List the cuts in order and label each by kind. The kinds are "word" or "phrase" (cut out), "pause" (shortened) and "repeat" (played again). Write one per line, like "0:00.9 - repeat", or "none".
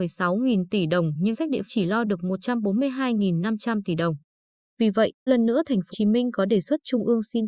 0:01.3 - word
0:01.7 - word
0:05.3 - word
0:05.9 - word